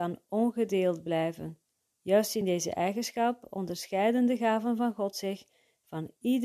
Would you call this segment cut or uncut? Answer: uncut